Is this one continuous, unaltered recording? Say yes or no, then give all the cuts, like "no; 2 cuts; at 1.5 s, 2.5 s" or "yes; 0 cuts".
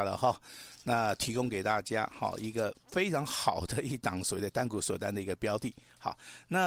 no; 1 cut; at 2.8 s